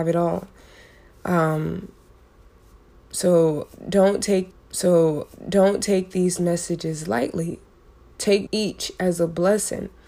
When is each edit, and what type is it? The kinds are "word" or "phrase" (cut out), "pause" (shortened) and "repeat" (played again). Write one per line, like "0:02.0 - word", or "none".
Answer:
0:04.5 - repeat
0:08.5 - word